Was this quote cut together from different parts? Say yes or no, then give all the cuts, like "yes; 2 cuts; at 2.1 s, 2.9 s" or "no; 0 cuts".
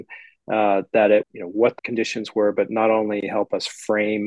yes; 2 cuts; at 1.2 s, 1.8 s